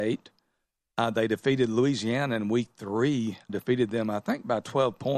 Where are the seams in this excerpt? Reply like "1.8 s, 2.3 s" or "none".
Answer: 3.5 s